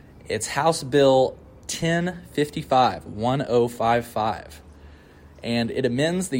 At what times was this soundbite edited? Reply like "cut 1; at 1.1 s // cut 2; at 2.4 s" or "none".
none